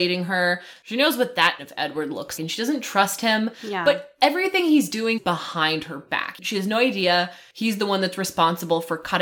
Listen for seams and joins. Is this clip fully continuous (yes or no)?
no